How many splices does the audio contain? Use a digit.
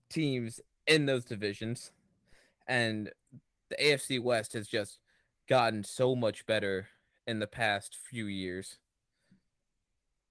0